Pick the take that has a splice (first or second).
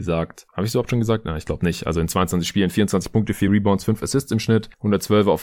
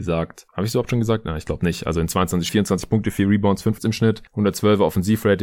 second